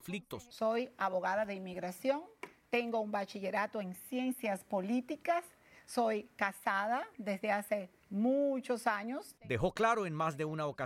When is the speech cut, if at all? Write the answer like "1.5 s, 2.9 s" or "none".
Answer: none